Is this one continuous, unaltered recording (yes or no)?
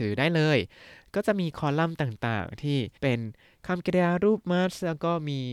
no